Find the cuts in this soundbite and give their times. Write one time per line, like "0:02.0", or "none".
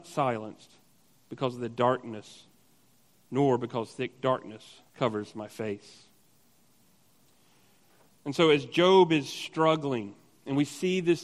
0:04.9